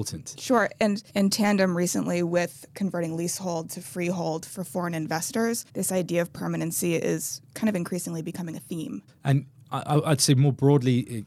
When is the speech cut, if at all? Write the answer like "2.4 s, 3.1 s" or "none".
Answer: 1.1 s, 5.7 s, 9.1 s